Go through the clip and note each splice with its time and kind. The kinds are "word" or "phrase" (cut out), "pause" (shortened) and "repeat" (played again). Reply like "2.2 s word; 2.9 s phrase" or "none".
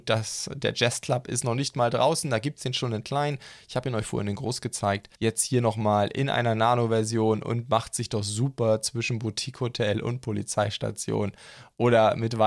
5.1 s pause